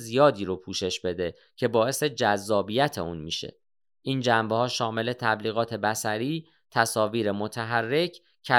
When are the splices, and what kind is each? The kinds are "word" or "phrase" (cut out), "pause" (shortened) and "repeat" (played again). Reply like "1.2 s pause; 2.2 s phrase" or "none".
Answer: none